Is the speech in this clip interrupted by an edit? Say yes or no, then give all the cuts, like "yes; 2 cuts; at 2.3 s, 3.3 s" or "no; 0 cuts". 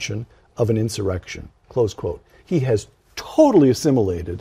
no; 0 cuts